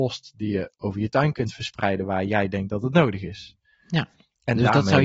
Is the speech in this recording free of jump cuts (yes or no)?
yes